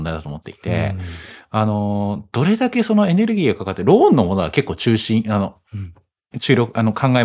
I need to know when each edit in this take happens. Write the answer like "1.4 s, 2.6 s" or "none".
none